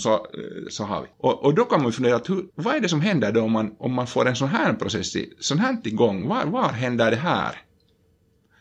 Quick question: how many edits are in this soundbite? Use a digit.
2